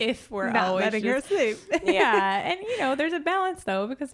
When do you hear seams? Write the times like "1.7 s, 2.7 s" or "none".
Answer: none